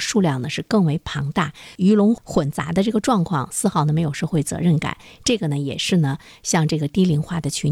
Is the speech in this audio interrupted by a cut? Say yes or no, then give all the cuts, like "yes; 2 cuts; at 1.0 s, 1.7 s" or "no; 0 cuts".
no; 0 cuts